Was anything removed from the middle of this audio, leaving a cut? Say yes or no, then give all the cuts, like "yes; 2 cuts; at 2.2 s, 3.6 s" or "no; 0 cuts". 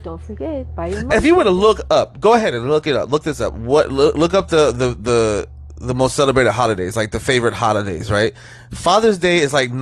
no; 0 cuts